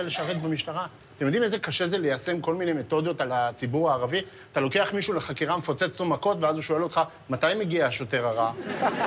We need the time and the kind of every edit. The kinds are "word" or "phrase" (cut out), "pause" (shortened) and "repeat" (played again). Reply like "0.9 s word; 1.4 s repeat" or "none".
none